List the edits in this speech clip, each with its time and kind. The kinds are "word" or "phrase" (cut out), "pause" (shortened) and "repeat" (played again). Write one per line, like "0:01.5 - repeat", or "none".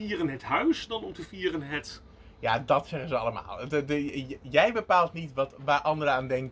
0:03.9 - word